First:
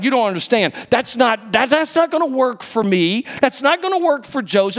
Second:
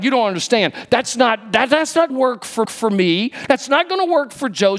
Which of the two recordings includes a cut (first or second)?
second